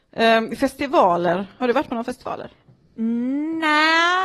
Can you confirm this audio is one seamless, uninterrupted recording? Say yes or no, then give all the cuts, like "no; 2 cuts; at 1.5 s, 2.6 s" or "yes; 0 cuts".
yes; 0 cuts